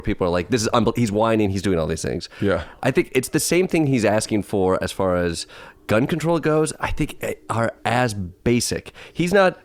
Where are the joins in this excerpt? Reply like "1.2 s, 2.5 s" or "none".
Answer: none

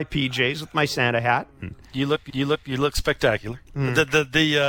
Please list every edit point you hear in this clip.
2.3 s, 3.7 s

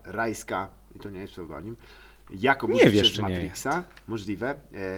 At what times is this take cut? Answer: none

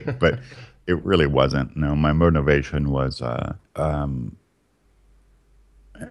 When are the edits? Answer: 3.7 s

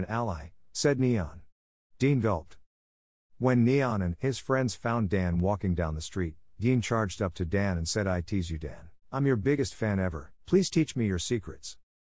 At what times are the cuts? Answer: 9.0 s, 10.4 s

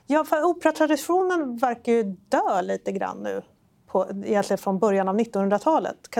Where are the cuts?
none

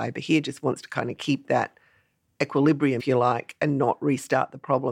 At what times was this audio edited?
3.0 s

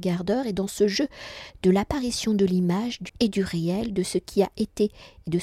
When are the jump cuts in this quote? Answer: 3.1 s

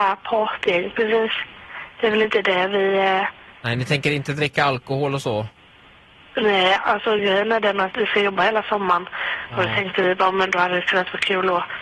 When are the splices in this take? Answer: none

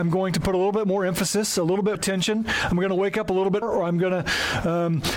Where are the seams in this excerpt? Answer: 1.9 s, 3.6 s

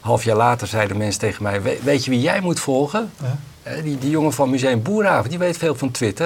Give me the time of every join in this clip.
none

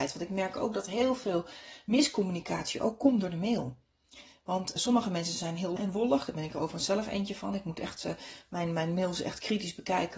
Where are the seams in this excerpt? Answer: 4.8 s, 5.8 s

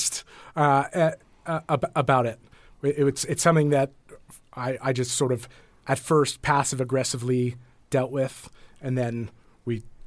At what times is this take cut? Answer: 4.4 s

